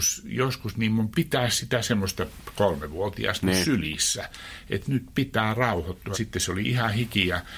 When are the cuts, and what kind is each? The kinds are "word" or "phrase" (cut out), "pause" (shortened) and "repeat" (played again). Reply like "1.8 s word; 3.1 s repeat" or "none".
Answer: 1.1 s word; 3.4 s word; 6.1 s word